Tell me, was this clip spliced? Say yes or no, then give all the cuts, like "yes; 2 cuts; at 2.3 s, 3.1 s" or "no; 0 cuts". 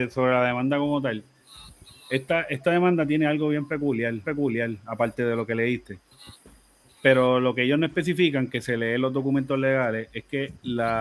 yes; 1 cut; at 4.2 s